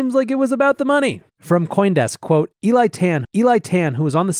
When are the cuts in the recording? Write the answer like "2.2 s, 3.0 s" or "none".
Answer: 1.3 s, 3.2 s